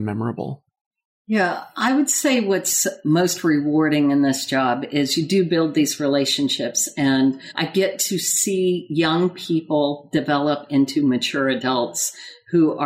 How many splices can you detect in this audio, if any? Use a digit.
0